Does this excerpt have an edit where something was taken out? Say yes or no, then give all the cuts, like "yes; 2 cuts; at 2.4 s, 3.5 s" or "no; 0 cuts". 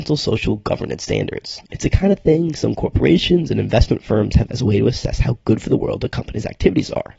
yes; 2 cuts; at 1.6 s, 4.5 s